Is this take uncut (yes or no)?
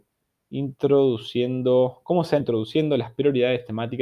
no